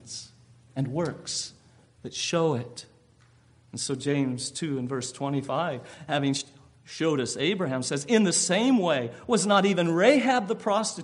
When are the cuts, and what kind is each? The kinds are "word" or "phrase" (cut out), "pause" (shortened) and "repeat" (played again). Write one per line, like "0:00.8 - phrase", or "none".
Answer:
none